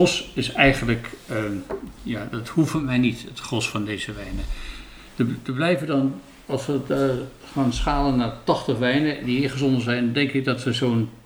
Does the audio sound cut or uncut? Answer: uncut